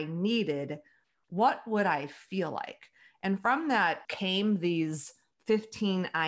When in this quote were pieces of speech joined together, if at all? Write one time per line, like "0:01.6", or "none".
0:04.0